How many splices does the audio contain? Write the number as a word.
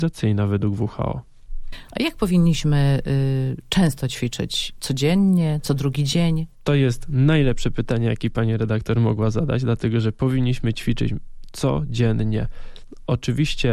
one